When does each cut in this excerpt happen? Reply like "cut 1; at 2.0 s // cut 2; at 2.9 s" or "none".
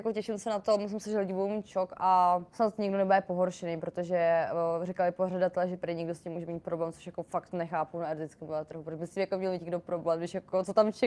cut 1; at 2.5 s